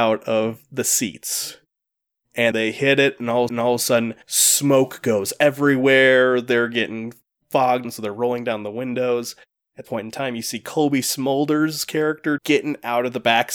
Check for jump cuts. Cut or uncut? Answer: cut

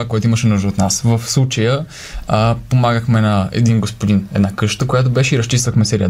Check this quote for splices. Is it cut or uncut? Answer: uncut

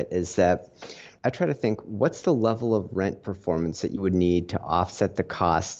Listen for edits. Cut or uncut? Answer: uncut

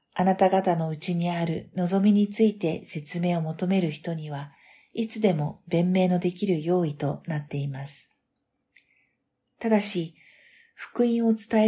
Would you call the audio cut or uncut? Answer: uncut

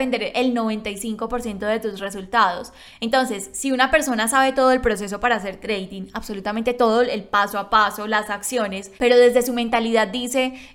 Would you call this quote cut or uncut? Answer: cut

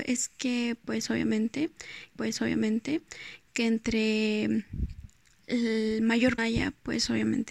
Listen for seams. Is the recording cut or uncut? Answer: cut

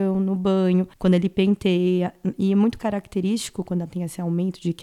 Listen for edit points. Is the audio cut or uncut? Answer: uncut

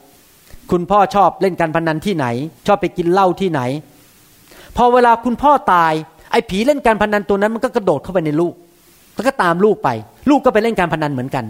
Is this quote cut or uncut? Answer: cut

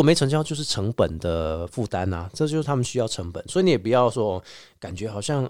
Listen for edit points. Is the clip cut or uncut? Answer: uncut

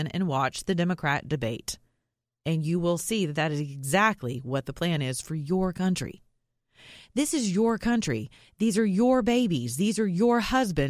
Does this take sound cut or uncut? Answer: uncut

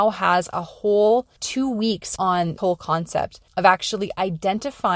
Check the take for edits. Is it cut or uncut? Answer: cut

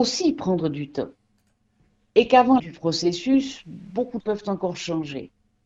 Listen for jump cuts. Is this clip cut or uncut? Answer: cut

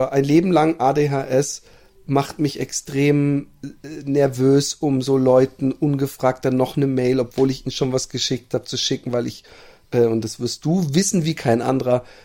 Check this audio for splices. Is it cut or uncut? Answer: uncut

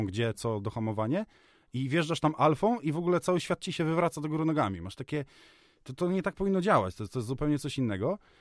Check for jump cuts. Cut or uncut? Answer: uncut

